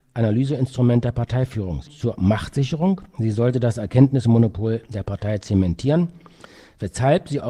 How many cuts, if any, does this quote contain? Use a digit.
1